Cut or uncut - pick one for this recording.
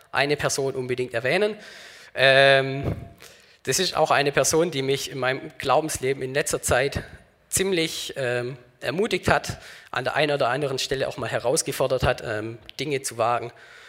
uncut